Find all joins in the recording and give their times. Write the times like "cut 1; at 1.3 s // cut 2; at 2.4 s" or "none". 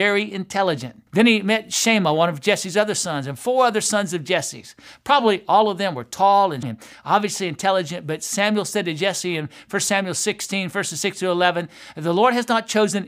cut 1; at 1.1 s // cut 2; at 6.6 s